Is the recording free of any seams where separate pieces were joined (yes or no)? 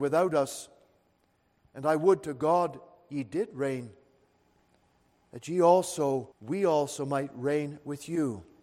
no